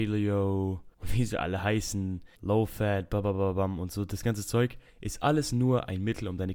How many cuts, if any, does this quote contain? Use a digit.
3